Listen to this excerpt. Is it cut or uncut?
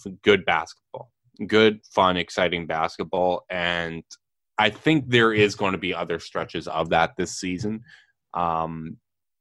uncut